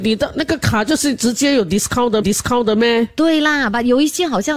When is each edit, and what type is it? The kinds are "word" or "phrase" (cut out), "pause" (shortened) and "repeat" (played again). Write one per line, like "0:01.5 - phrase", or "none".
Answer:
0:02.2 - repeat

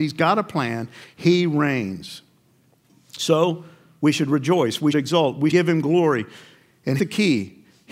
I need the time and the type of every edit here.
0:04.9 - word
0:05.5 - word
0:07.0 - word

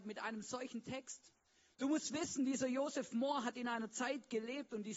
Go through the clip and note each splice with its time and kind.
none

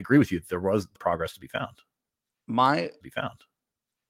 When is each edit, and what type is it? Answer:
0:01.0 - word
0:03.0 - repeat

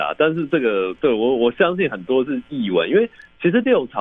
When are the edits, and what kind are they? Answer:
none

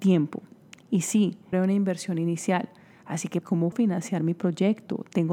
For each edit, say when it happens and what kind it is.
0:01.5 - word
0:03.4 - word
0:03.7 - word

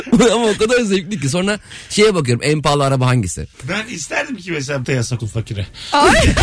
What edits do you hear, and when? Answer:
0:03.5 - pause
0:04.8 - word
0:05.2 - word

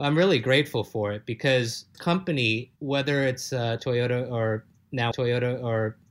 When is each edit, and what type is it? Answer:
0:01.9 - word
0:02.8 - pause
0:05.1 - repeat

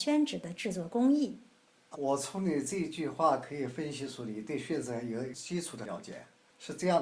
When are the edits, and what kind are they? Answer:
0:01.9 - word

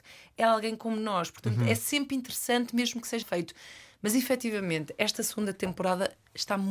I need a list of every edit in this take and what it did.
0:03.2 - word

